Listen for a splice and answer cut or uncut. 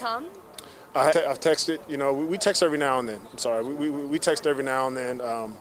cut